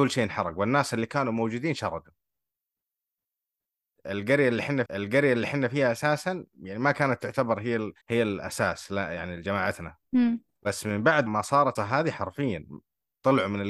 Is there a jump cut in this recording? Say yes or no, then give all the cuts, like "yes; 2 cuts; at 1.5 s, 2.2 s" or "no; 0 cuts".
yes; 5 cuts; at 4.9 s, 8.0 s, 10.0 s, 11.3 s, 11.8 s